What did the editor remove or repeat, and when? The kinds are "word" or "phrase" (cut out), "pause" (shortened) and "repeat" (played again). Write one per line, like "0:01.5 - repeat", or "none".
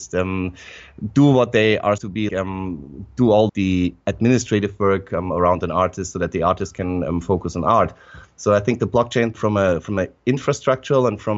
0:02.0 - word
0:02.3 - word
0:03.5 - word
0:09.3 - word